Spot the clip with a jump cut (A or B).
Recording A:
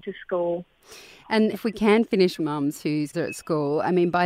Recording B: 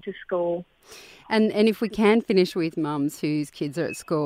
A